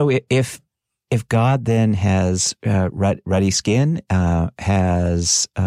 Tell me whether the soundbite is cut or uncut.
uncut